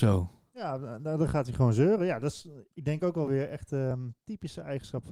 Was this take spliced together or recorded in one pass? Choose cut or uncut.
uncut